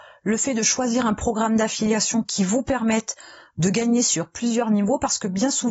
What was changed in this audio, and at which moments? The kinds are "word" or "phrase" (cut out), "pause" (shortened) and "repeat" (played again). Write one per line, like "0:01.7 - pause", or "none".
none